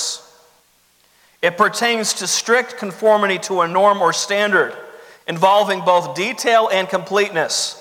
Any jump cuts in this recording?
no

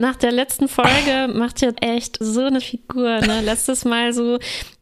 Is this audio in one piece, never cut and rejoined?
no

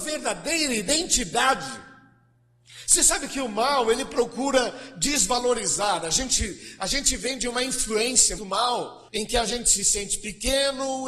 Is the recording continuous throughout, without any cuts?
no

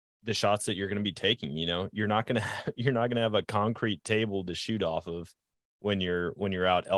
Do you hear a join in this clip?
no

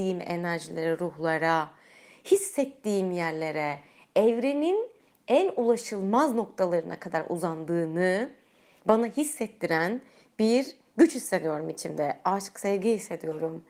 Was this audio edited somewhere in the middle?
no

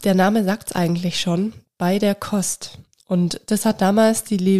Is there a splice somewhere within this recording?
no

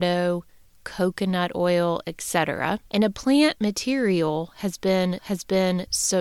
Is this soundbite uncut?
no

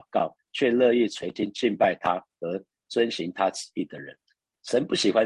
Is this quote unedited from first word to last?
yes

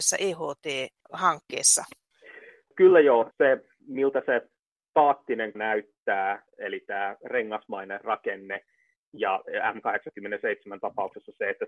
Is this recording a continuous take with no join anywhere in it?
no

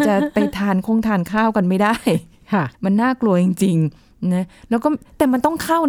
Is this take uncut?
no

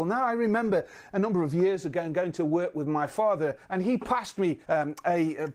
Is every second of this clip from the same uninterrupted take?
no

